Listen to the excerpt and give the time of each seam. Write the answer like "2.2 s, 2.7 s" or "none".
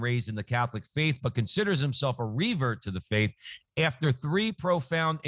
none